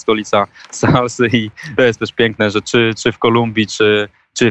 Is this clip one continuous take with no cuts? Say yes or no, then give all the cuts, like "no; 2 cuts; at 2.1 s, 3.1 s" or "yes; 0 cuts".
yes; 0 cuts